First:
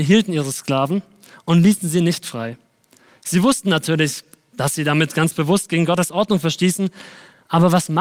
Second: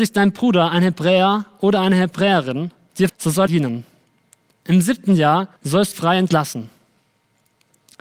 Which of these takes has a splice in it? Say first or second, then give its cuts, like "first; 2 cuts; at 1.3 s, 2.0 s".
second; 4 cuts; at 3.1 s, 3.5 s, 5.6 s, 5.9 s